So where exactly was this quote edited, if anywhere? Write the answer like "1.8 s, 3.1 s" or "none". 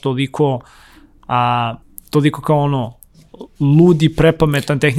1.8 s